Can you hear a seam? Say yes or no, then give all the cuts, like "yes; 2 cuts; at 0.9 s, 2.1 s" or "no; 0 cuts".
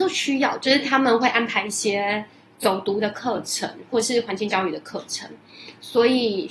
no; 0 cuts